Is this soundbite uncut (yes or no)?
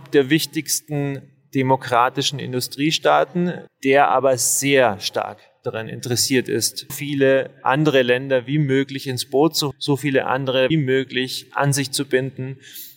no